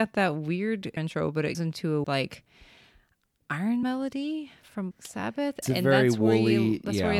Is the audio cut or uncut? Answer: cut